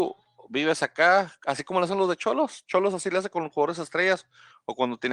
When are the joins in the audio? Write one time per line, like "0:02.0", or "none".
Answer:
none